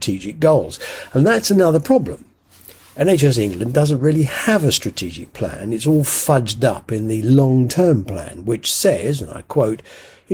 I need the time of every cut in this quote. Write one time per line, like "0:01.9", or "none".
none